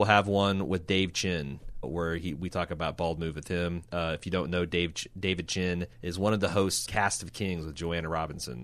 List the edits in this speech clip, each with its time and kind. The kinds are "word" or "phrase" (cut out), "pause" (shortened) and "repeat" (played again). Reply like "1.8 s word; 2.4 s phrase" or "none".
1.8 s word; 5.9 s pause; 6.9 s word

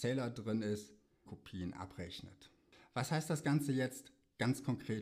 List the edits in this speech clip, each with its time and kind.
1.3 s phrase

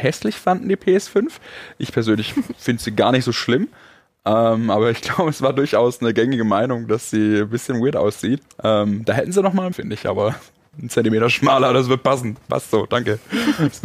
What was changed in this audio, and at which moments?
8.5 s pause; 9.7 s phrase; 10.7 s phrase

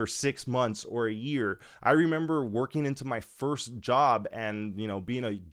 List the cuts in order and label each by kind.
none

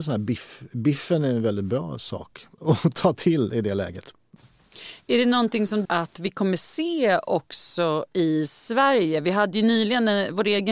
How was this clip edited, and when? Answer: 2.5 s pause; 5.8 s phrase

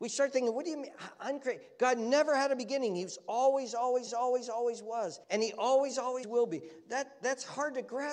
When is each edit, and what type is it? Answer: 4.1 s repeat; 5.2 s pause; 6.2 s word

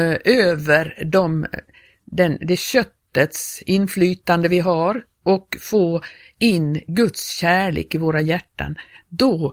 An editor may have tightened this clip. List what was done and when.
none

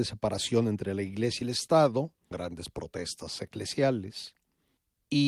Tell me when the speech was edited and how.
1.4 s word; 2.3 s word

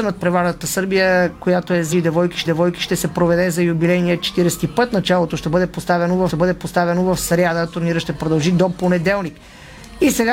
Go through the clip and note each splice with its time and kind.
1.9 s word; 2.5 s repeat; 6.3 s repeat

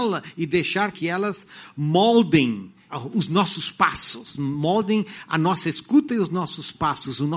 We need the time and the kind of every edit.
0.9 s word; 2.9 s word

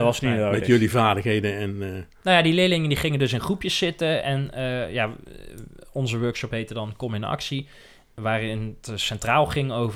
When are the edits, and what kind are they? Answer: none

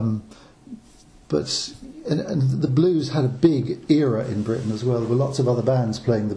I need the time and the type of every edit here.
none

